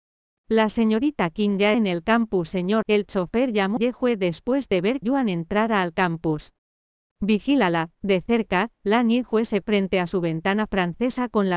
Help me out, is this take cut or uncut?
cut